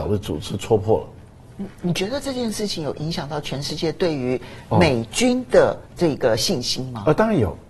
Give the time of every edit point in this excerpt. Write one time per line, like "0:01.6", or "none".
0:05.9